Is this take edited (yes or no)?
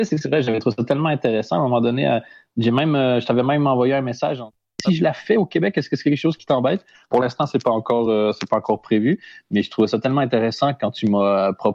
no